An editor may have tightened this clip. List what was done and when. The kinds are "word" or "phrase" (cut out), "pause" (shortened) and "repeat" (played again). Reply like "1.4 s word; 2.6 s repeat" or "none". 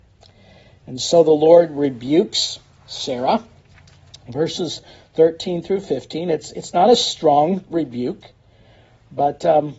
none

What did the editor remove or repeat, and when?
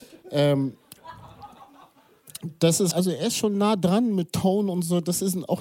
2.9 s word

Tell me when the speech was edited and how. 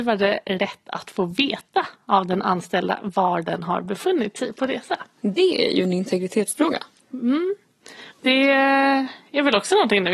8.1 s pause

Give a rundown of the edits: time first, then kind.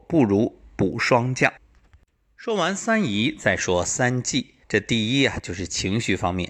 1.6 s pause; 4.6 s pause

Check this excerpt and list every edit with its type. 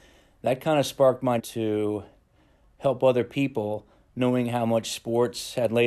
1.4 s word

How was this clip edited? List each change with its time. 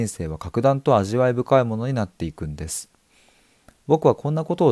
none

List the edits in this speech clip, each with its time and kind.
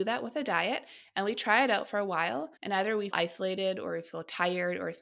2.6 s pause; 3.1 s word

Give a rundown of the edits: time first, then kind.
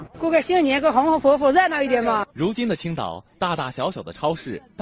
2.3 s pause

